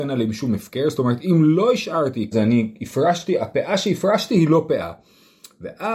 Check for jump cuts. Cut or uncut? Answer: cut